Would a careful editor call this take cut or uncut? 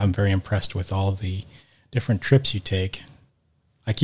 uncut